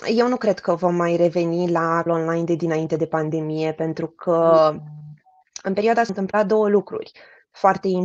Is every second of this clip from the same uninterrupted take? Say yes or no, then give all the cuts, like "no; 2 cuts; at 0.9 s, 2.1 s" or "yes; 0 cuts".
no; 2 cuts; at 2.1 s, 6.1 s